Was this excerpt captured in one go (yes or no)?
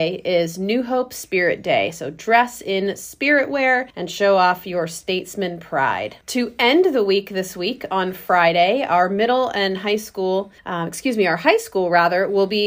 no